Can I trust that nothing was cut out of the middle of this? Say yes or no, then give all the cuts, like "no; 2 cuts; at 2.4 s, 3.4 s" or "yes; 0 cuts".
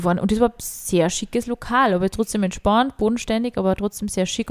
yes; 0 cuts